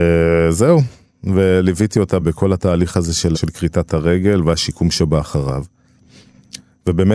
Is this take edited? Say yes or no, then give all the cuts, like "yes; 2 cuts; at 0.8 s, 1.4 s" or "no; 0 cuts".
yes; 2 cuts; at 2.2 s, 3.3 s